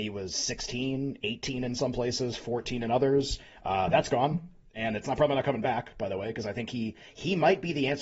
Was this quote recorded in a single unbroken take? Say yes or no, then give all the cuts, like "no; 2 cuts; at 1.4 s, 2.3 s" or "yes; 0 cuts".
yes; 0 cuts